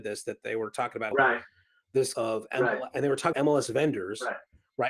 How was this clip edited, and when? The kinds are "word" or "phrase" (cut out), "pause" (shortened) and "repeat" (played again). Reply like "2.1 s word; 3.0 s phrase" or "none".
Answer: 1.1 s word; 2.1 s word; 3.3 s word